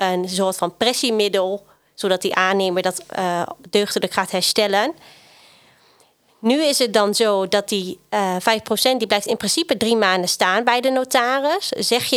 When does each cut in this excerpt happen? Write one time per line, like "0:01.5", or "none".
none